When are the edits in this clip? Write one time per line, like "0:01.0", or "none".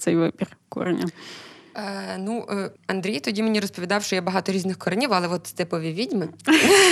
0:02.8